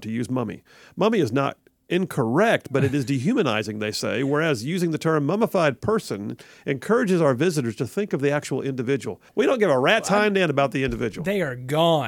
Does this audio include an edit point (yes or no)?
yes